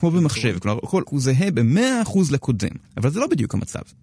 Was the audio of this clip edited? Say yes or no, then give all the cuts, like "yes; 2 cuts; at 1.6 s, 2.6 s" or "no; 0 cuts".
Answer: yes; 2 cuts; at 1.1 s, 2.9 s